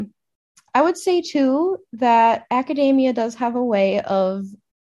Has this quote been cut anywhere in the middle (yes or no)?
no